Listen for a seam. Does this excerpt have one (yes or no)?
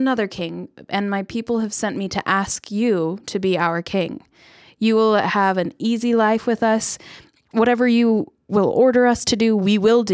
no